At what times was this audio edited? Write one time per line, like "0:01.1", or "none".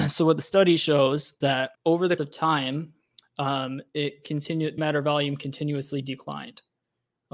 0:01.4
0:01.7
0:02.2
0:04.8